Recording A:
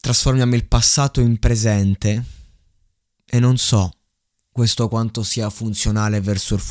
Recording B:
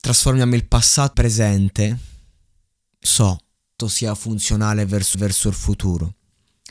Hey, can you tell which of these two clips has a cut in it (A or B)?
B